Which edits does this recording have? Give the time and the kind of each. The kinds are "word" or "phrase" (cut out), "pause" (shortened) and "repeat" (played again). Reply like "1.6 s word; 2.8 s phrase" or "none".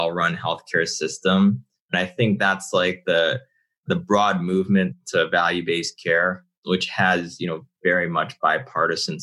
none